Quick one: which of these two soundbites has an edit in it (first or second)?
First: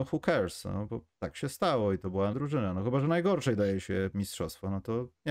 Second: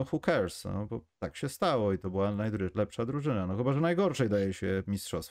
first